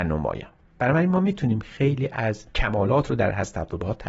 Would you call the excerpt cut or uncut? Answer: cut